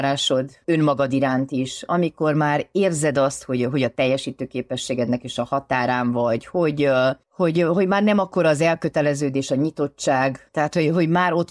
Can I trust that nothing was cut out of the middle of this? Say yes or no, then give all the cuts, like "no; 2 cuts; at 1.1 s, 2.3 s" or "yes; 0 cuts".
no; 2 cuts; at 7.2 s, 10.5 s